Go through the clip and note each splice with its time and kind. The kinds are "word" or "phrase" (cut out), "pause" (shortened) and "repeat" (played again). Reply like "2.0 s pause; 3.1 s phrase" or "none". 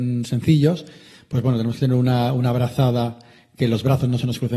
none